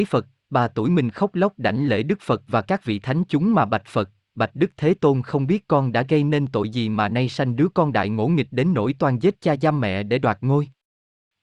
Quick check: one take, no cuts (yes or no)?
yes